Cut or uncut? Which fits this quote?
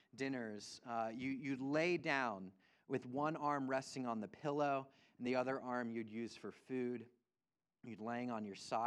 uncut